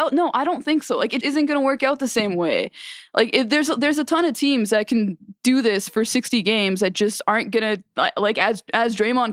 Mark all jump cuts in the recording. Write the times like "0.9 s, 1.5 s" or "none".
1.2 s